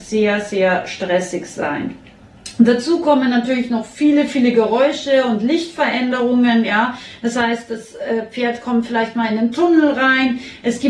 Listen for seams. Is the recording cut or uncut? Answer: uncut